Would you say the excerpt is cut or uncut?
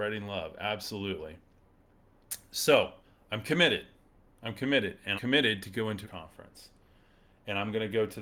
cut